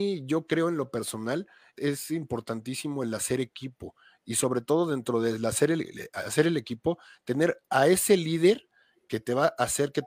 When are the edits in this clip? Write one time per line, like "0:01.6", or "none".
0:01.8